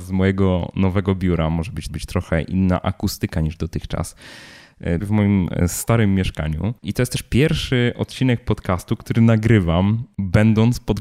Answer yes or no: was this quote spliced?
yes